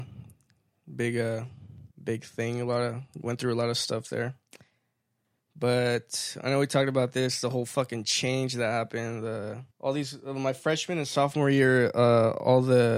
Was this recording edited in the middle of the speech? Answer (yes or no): yes